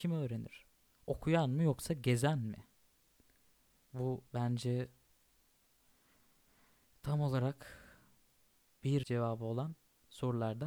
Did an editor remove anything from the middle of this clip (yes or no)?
yes